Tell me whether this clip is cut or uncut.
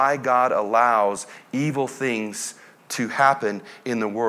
uncut